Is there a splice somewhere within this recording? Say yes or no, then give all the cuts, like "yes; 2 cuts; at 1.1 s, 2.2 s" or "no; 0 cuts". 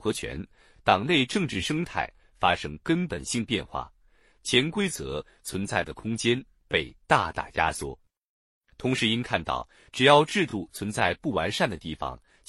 no; 0 cuts